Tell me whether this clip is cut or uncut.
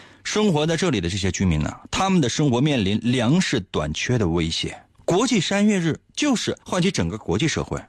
cut